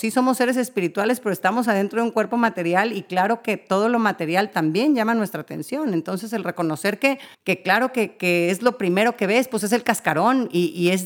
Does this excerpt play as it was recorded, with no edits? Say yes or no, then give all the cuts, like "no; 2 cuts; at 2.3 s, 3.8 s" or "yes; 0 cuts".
no; 1 cut; at 7.3 s